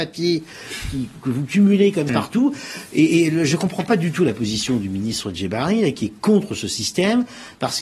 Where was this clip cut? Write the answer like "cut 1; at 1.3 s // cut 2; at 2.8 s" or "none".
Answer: cut 1; at 2.1 s